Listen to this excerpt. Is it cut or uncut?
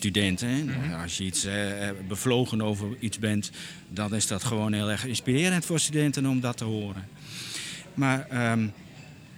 uncut